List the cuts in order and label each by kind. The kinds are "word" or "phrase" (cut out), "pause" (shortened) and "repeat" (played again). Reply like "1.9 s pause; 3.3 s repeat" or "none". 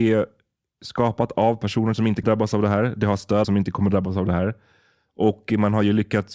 2.2 s word; 3.4 s phrase

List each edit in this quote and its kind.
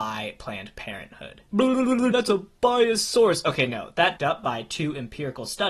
2.1 s word; 4.2 s phrase

